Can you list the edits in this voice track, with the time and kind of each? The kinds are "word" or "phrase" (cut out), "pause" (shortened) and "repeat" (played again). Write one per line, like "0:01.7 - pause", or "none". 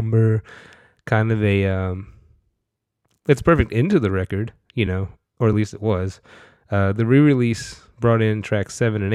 none